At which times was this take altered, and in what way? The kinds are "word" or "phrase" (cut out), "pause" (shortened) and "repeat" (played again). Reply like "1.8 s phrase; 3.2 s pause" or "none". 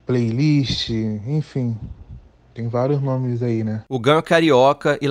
none